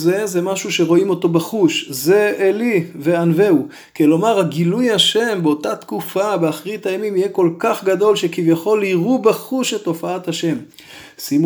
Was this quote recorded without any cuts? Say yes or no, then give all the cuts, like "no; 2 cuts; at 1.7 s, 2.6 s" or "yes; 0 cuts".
yes; 0 cuts